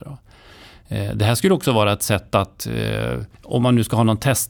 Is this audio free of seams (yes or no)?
no